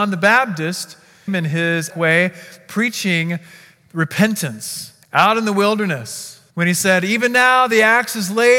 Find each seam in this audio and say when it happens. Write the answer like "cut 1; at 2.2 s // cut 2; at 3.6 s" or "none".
cut 1; at 1.3 s // cut 2; at 1.9 s // cut 3; at 5.0 s // cut 4; at 6.5 s